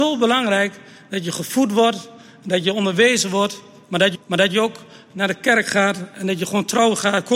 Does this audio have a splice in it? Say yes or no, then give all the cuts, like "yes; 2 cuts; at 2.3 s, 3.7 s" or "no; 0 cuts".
yes; 1 cut; at 4.1 s